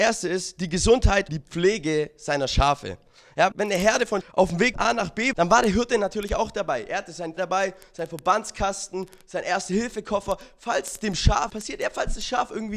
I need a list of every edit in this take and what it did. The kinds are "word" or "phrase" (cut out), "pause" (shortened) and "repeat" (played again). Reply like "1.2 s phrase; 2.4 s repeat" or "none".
1.3 s word; 3.5 s word; 4.2 s word; 4.7 s word; 5.3 s word; 7.4 s word; 11.5 s word